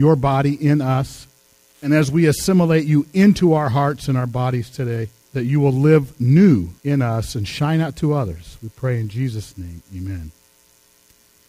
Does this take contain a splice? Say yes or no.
yes